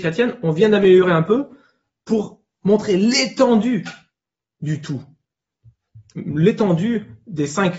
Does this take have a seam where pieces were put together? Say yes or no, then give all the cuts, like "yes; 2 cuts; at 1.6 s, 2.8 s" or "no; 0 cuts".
no; 0 cuts